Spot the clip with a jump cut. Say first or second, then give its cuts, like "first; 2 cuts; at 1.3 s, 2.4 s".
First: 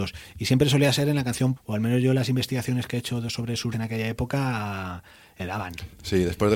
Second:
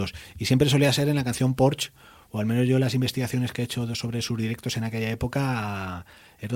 first; 3 cuts; at 1.6 s, 3.7 s, 5.4 s